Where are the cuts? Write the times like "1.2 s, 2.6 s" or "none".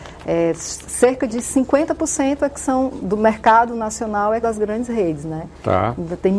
4.4 s